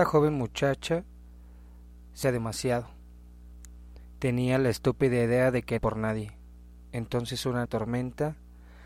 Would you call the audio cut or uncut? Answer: cut